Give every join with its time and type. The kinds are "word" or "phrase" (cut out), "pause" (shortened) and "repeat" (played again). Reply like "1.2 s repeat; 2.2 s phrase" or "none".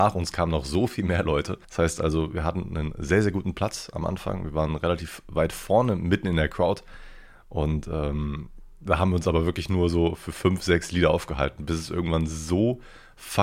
1.6 s pause